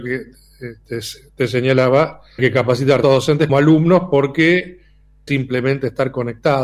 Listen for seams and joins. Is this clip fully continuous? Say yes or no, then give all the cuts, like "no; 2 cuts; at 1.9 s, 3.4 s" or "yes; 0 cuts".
no; 4 cuts; at 2.4 s, 3.0 s, 3.5 s, 5.3 s